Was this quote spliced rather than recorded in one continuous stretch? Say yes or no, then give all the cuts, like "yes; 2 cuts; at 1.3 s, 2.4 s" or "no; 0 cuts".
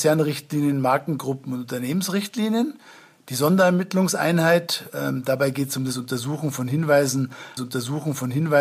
yes; 1 cut; at 7.6 s